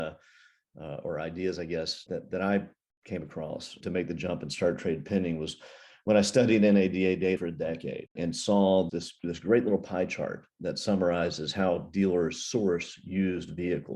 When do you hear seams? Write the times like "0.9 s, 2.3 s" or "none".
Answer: 2.1 s, 3.8 s, 7.4 s, 8.2 s, 8.9 s